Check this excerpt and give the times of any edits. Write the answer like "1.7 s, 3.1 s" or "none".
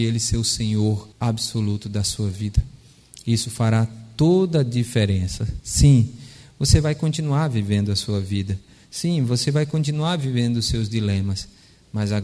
1.1 s